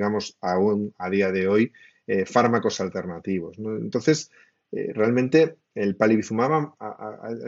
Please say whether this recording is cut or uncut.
uncut